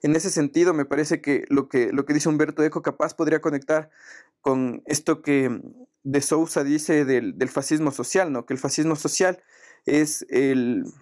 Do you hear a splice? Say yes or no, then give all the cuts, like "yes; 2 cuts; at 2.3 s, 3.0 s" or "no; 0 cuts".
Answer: no; 0 cuts